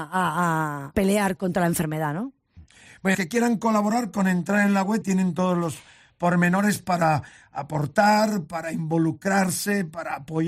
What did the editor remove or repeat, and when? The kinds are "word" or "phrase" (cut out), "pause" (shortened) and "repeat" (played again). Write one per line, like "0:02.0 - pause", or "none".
0:00.9 - word
0:01.4 - word
0:03.1 - word
0:05.0 - word